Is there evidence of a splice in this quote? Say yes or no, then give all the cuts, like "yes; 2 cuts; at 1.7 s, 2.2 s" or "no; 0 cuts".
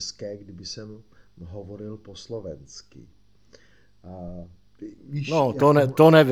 no; 0 cuts